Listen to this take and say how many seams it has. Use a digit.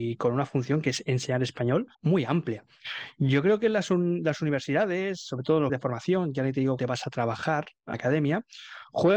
4